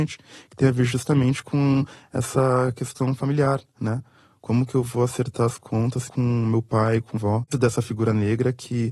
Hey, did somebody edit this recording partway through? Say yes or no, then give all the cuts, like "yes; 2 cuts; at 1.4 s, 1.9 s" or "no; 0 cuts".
yes; 3 cuts; at 6.1 s, 7.2 s, 7.5 s